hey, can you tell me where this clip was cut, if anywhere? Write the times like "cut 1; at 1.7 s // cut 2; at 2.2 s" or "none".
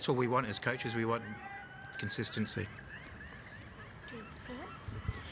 cut 1; at 1.9 s